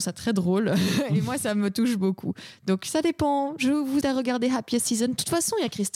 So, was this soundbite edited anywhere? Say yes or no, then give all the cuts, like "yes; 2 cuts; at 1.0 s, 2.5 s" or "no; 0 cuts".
yes; 1 cut; at 4.0 s